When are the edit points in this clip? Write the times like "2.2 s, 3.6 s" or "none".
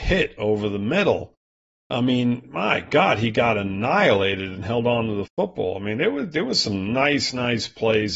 none